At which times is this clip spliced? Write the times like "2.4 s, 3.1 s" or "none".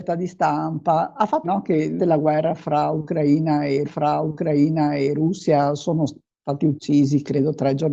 1.4 s, 2.0 s, 3.8 s